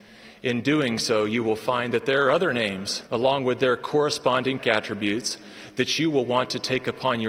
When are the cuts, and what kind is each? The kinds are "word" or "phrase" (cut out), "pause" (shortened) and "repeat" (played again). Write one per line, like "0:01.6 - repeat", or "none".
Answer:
0:03.1 - pause
0:04.6 - phrase

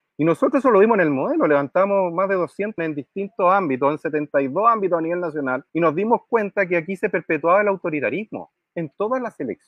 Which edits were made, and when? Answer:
0:02.8 - word
0:05.7 - pause

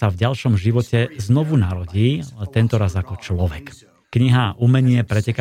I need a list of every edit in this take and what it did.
0:04.0 - pause

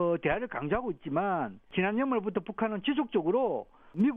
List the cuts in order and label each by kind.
0:01.6 - pause

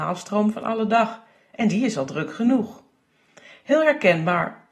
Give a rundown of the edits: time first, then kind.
none

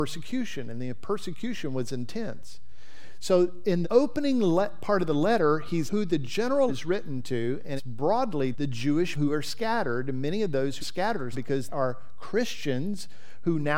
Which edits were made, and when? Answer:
0:03.8 - word
0:05.9 - word
0:06.7 - word
0:07.8 - word
0:08.5 - word
0:09.1 - word
0:10.8 - word
0:11.3 - word
0:11.7 - word

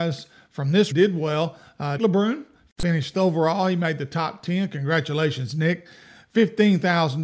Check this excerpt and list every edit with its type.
0:00.9 - word
0:02.0 - word
0:03.1 - word

